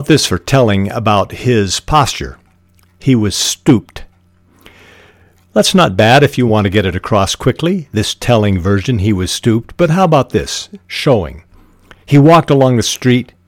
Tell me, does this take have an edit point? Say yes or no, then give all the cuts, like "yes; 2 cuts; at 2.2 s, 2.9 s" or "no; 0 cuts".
no; 0 cuts